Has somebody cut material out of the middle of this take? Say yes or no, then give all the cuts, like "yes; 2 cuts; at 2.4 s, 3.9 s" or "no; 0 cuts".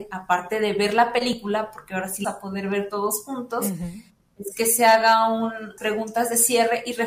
yes; 2 cuts; at 2.2 s, 5.8 s